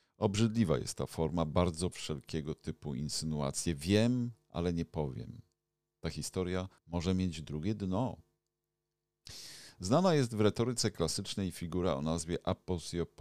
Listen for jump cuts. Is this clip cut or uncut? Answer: cut